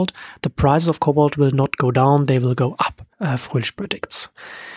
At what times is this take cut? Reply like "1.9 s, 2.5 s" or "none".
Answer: 3.1 s